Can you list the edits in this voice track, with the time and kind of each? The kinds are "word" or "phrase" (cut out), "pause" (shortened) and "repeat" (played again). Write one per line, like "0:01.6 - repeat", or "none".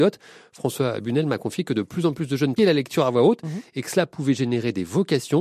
0:02.6 - word